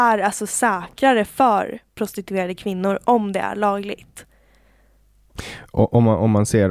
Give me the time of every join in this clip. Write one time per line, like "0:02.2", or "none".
none